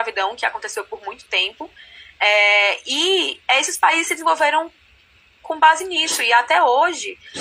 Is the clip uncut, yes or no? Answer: yes